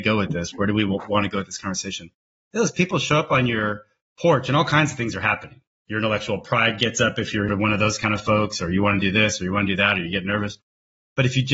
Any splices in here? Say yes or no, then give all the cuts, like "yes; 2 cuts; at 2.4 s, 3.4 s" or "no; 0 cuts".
yes; 1 cut; at 7.5 s